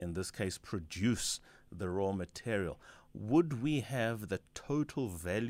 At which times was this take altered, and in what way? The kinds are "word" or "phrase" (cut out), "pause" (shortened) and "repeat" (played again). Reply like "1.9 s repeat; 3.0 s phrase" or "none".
none